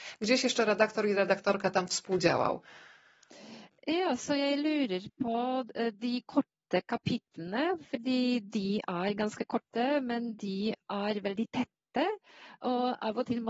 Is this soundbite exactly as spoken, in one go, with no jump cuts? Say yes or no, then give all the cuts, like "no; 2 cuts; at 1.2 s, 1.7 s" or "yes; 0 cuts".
yes; 0 cuts